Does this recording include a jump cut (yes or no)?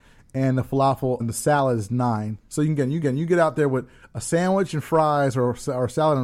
yes